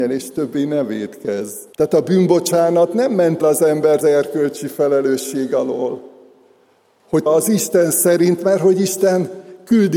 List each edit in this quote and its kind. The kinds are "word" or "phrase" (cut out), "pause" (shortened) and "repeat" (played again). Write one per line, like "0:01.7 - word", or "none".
0:01.7 - pause
0:03.4 - word
0:04.0 - word
0:07.3 - word